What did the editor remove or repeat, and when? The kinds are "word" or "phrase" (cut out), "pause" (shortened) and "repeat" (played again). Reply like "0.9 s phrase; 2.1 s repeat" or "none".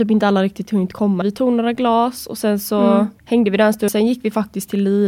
1.2 s phrase; 3.2 s pause; 3.9 s word